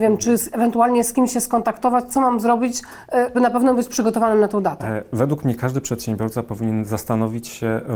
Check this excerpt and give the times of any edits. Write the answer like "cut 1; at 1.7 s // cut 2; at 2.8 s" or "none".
cut 1; at 3.3 s